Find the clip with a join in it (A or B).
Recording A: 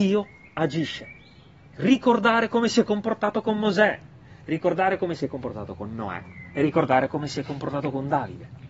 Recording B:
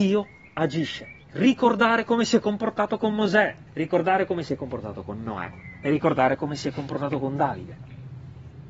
B